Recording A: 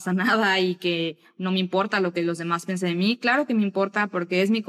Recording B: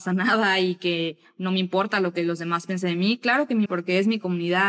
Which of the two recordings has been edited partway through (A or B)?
B